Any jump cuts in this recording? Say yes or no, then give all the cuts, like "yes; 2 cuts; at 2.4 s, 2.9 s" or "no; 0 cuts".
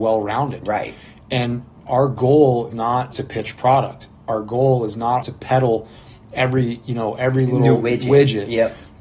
yes; 4 cuts; at 1.9 s, 2.7 s, 3.1 s, 5.2 s